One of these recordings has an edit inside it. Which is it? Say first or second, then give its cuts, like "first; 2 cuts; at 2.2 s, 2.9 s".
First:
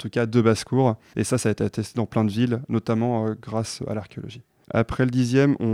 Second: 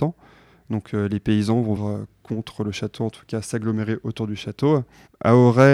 second; 1 cut; at 1.8 s